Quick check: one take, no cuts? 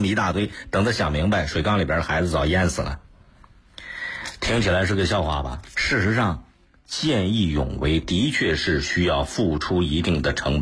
yes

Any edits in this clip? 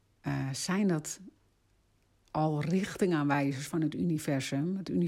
no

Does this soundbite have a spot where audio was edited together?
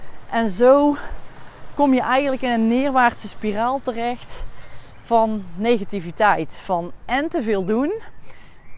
no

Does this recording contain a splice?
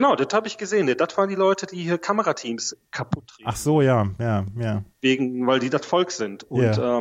yes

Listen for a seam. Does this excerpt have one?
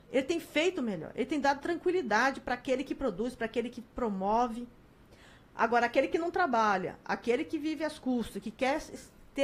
no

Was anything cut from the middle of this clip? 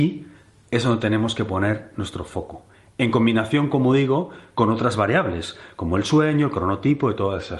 no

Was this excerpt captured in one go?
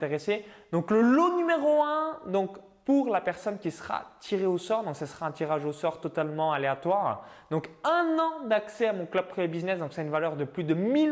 yes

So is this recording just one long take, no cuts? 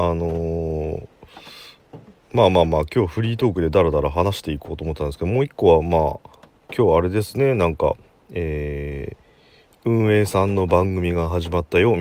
yes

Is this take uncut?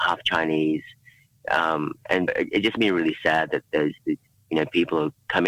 no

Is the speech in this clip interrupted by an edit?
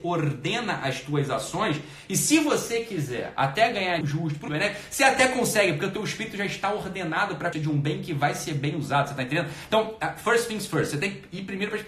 yes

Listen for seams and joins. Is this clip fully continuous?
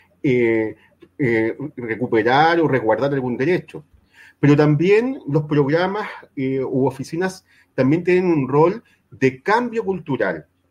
yes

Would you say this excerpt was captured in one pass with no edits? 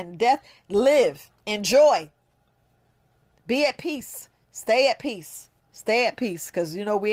no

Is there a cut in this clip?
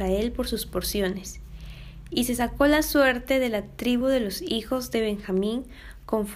no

